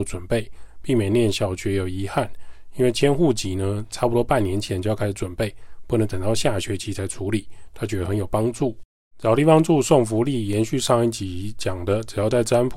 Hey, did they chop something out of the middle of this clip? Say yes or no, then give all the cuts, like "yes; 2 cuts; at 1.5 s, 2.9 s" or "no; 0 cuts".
no; 0 cuts